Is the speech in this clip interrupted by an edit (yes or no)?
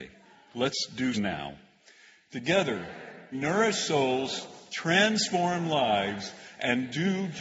yes